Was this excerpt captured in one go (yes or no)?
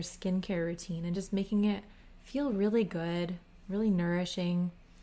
yes